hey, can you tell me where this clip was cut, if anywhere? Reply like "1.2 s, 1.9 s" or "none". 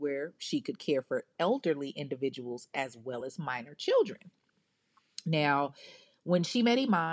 none